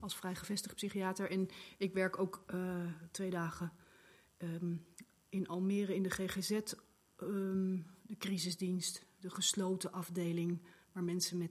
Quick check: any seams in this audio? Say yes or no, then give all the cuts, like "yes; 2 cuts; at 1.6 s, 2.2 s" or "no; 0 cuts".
no; 0 cuts